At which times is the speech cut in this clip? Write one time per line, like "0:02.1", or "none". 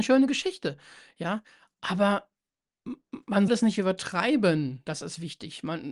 0:03.5